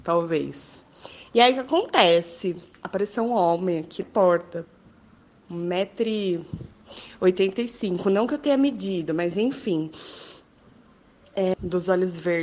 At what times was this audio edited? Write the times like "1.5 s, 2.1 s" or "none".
4.0 s, 11.5 s